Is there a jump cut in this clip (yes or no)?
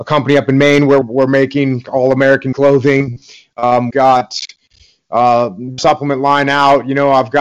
yes